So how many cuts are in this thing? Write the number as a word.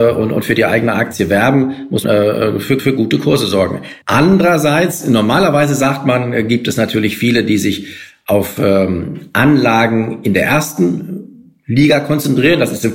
three